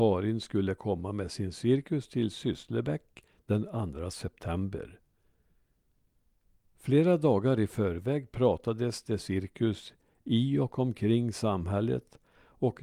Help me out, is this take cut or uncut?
uncut